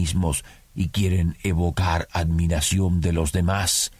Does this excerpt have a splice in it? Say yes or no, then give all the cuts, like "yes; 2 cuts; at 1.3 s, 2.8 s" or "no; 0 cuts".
no; 0 cuts